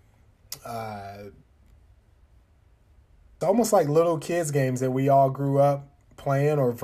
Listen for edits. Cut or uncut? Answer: cut